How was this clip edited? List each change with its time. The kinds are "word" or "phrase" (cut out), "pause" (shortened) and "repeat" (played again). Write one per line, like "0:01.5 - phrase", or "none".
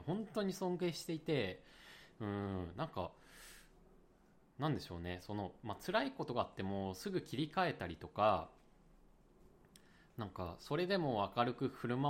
none